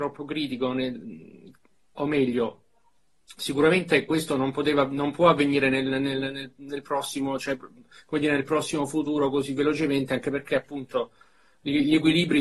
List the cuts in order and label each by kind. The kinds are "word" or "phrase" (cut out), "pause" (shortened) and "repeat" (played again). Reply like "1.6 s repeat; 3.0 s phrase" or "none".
none